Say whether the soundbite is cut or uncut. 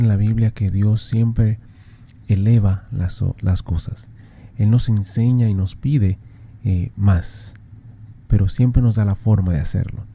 uncut